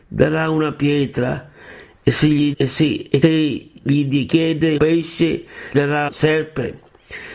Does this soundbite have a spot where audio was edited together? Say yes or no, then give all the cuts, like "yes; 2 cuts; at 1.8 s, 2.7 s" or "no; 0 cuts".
yes; 5 cuts; at 2.5 s, 3.2 s, 4.8 s, 5.7 s, 6.1 s